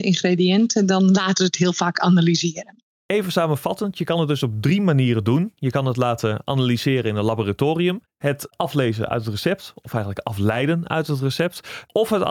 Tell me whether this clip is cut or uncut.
uncut